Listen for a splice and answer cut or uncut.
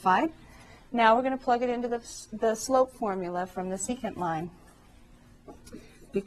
uncut